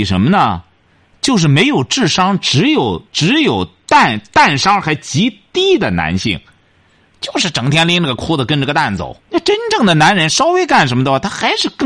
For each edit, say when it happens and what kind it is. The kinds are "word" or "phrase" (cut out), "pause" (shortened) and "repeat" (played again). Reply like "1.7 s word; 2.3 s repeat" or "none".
3.1 s pause; 9.2 s pause